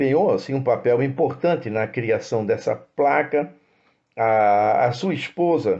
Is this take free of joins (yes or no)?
yes